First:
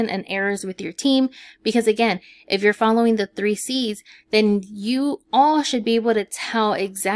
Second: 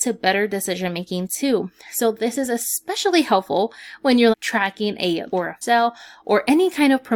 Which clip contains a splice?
second; 3 cuts; at 4.3 s, 5.3 s, 5.6 s

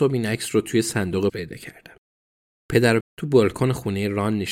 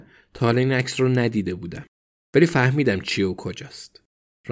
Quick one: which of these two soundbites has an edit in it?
first; 2 cuts; at 1.3 s, 3.0 s

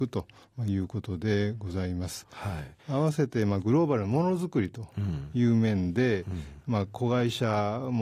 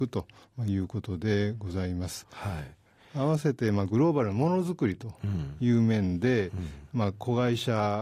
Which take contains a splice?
first; 1 cut; at 2.8 s

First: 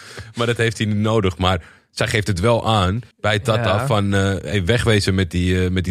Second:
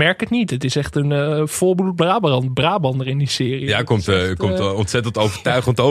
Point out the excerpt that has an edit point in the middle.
first; 1 cut; at 3.1 s

